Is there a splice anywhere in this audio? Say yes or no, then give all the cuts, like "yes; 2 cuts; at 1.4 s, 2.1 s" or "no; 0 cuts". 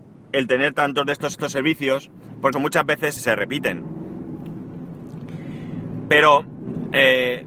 yes; 3 cuts; at 1.3 s, 2.5 s, 3.2 s